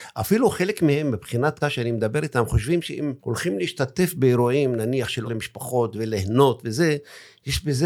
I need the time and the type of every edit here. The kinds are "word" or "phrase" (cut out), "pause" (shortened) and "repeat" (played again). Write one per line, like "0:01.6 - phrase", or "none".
0:01.6 - word
0:03.2 - pause
0:05.2 - word